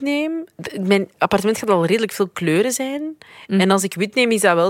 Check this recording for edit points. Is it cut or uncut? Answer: uncut